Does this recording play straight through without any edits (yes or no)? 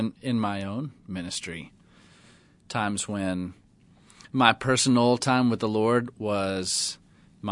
yes